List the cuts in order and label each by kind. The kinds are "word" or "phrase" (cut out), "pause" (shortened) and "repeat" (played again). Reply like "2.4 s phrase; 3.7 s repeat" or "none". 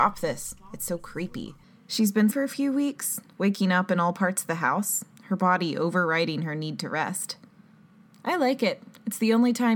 1.6 s pause; 2.3 s word